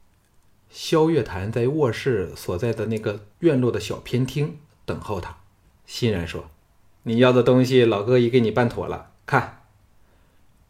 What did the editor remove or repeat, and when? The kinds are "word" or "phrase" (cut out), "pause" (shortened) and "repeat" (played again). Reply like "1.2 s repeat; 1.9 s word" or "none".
3.3 s pause; 5.6 s pause; 6.5 s pause; 9.2 s pause